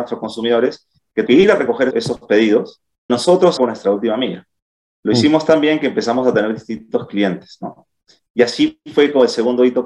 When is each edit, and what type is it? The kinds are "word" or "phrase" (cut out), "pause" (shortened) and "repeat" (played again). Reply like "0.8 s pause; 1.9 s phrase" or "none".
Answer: 1.3 s word; 1.9 s word; 3.1 s word; 3.6 s word